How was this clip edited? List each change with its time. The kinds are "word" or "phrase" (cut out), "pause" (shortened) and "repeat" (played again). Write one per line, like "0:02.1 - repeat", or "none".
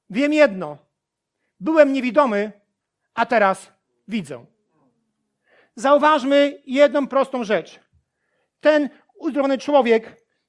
none